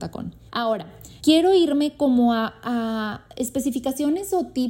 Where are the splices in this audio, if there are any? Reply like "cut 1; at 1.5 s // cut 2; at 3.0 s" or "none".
none